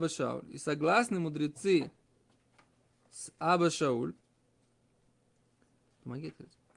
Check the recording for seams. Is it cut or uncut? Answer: uncut